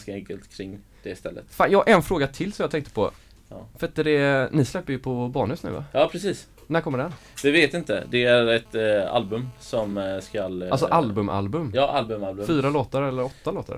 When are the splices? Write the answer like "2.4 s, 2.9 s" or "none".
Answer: none